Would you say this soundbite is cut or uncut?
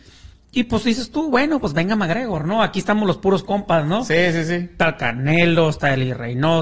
uncut